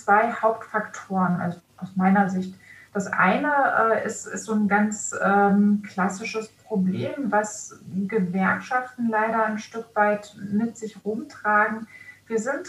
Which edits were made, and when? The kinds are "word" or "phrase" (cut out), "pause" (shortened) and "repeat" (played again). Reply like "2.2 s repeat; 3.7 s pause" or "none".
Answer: none

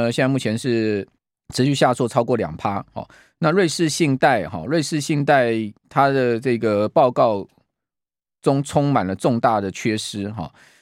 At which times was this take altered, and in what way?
1.2 s pause; 5.8 s pause

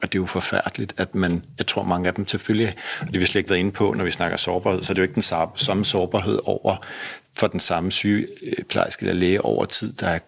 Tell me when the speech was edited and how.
none

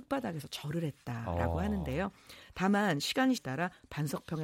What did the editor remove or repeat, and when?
3.4 s word

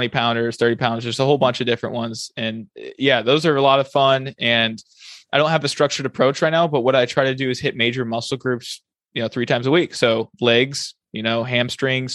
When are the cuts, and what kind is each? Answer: none

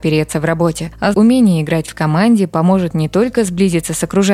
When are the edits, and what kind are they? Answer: 1.1 s word

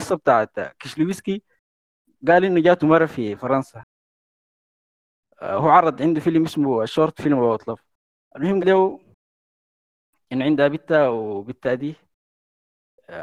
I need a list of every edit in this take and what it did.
8.6 s word

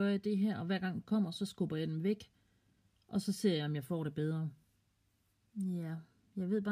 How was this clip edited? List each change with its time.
1.0 s word

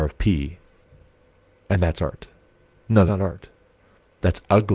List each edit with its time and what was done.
3.1 s word

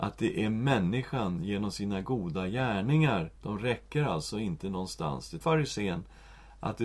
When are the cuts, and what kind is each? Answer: 3.4 s pause; 5.4 s word

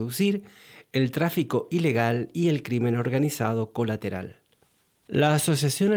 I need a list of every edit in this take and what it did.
none

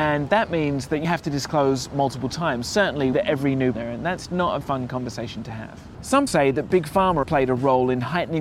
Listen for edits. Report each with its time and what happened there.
1.0 s word; 3.1 s word; 3.7 s word; 4.3 s word; 4.6 s word; 6.3 s word; 7.2 s word

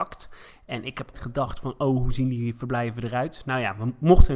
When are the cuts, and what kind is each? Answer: 1.1 s word

